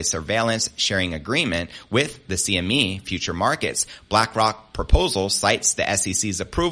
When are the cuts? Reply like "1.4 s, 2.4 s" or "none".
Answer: none